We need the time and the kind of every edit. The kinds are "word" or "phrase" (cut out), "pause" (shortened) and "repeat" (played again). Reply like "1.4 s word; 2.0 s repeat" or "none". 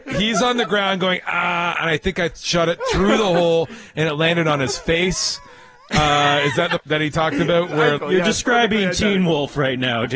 6.8 s word; 8.0 s word